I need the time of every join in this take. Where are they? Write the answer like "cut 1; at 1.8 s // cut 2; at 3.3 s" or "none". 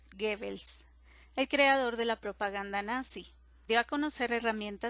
cut 1; at 3.7 s